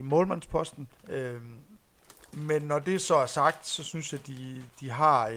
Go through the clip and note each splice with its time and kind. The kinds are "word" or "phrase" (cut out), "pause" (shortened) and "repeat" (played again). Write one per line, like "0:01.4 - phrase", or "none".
0:01.0 - pause